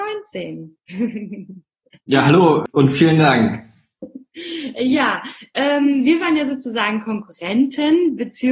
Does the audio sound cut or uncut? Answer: uncut